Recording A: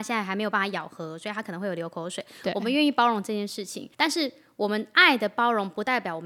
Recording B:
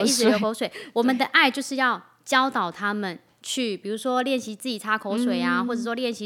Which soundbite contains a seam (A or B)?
A